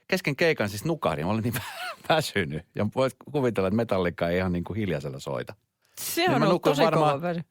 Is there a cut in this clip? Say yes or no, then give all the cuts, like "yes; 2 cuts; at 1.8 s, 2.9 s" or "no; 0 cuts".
yes; 1 cut; at 5.8 s